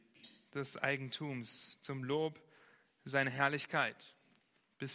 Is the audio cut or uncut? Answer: uncut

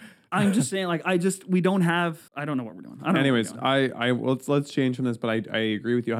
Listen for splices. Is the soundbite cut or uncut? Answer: cut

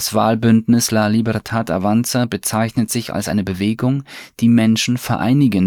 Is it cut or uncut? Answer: uncut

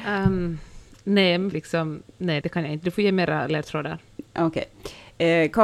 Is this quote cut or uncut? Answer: cut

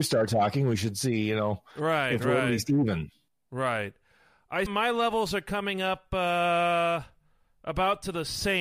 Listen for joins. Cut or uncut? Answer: cut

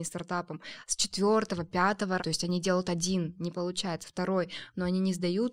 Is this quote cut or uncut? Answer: cut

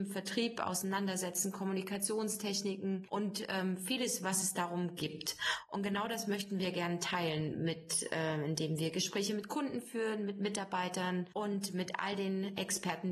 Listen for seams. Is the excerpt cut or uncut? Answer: uncut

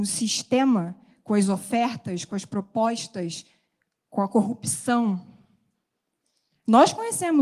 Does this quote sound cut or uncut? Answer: uncut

